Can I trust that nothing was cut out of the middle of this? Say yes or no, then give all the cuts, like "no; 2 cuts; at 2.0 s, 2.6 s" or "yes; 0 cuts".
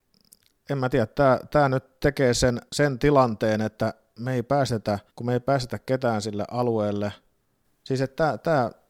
no; 2 cuts; at 2.7 s, 5.1 s